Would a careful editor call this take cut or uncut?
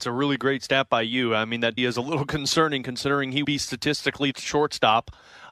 cut